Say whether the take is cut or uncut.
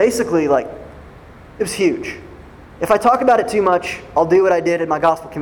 uncut